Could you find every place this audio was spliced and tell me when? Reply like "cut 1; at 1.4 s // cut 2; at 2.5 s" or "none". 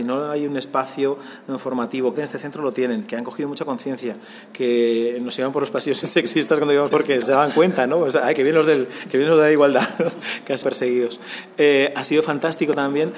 cut 1; at 2.1 s // cut 2; at 6.0 s // cut 3; at 6.9 s // cut 4; at 7.2 s // cut 5; at 10.6 s